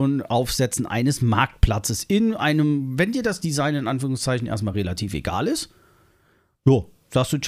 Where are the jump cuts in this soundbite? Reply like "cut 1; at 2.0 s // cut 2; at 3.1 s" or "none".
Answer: none